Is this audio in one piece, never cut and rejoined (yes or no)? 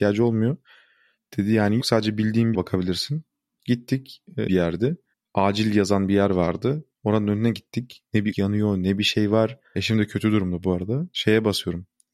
no